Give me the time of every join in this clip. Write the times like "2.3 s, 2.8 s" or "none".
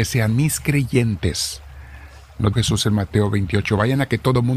2.5 s